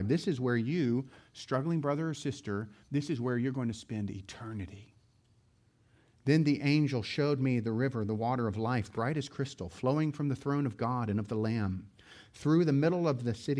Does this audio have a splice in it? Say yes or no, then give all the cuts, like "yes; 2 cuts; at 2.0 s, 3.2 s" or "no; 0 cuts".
no; 0 cuts